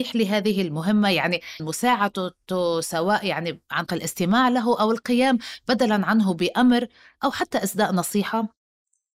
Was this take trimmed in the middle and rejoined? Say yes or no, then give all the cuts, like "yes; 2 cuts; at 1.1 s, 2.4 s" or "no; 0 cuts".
yes; 2 cuts; at 1.6 s, 3.9 s